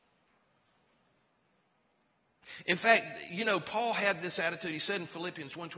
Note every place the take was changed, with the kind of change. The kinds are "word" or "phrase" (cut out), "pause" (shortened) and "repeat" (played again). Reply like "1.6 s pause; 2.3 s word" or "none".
none